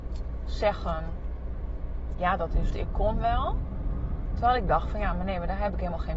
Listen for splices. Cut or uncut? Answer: cut